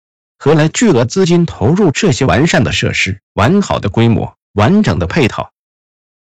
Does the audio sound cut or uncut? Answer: cut